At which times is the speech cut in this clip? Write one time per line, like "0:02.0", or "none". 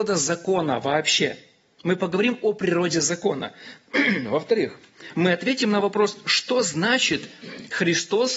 none